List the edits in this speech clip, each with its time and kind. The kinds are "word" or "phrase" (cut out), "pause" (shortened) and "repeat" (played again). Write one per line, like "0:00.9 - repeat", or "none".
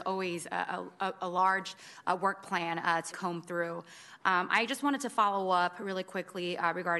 0:03.1 - word